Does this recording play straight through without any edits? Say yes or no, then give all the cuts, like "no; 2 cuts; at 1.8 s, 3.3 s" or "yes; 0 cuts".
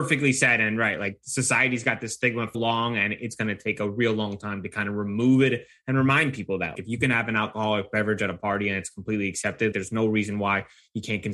no; 3 cuts; at 2.5 s, 6.7 s, 9.7 s